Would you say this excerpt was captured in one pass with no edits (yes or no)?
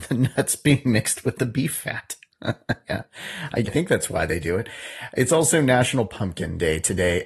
no